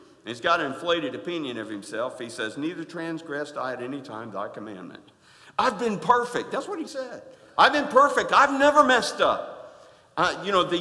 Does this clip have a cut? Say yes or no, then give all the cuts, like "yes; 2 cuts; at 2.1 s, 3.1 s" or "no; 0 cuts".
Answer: yes; 2 cuts; at 5.1 s, 6.9 s